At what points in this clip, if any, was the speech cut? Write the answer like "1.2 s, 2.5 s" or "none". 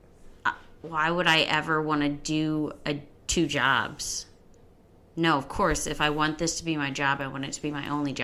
none